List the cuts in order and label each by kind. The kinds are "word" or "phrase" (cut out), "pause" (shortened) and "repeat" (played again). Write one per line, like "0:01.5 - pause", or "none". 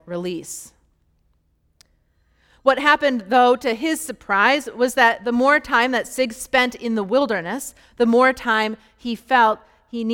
none